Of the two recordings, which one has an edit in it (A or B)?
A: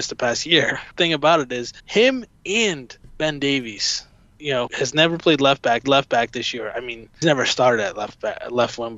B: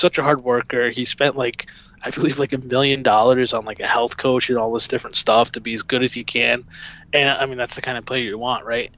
A